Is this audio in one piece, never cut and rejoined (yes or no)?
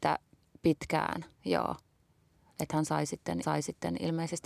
no